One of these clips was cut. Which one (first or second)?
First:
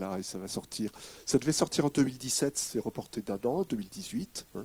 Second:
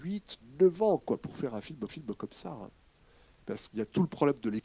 second